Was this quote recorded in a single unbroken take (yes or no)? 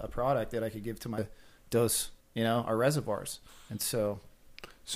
no